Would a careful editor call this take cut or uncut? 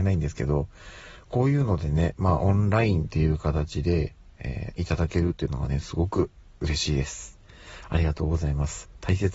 uncut